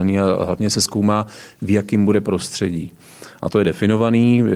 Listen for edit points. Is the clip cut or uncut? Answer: uncut